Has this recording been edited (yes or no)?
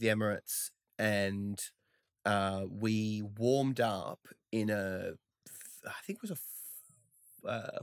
no